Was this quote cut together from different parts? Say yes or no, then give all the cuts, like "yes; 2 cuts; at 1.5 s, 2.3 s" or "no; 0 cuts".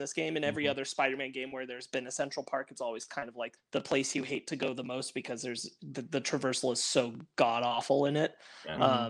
yes; 1 cut; at 3.6 s